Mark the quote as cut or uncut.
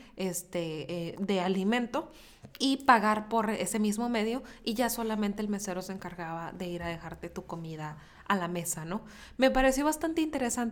cut